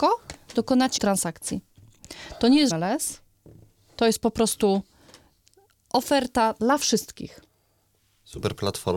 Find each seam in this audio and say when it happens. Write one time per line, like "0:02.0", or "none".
0:01.0
0:02.7